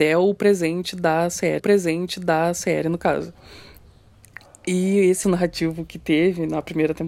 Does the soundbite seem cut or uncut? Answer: cut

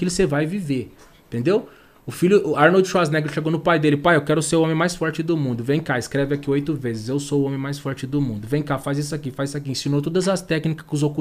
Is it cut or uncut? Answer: uncut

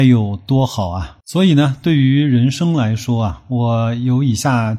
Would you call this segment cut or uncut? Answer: cut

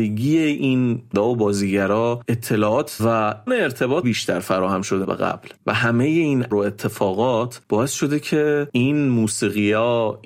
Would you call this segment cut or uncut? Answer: cut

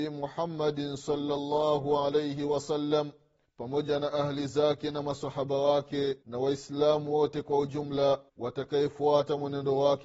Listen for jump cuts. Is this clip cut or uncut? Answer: cut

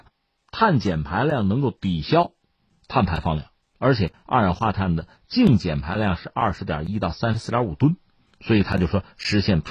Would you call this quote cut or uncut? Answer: uncut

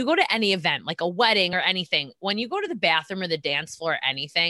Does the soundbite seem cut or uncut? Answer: uncut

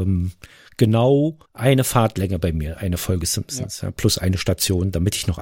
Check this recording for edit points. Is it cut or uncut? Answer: cut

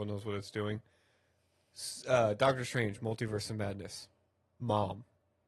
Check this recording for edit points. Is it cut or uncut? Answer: uncut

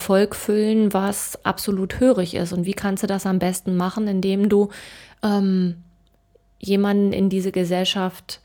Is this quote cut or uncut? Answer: uncut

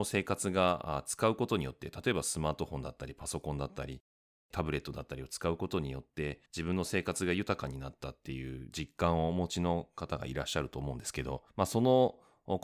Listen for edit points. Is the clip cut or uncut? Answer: cut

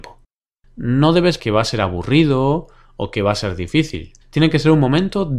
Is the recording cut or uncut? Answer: cut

